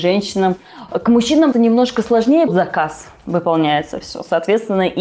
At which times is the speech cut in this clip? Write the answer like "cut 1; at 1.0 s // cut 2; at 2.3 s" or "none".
cut 1; at 1.5 s // cut 2; at 2.5 s